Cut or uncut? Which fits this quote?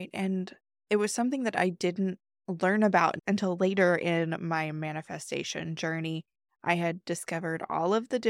uncut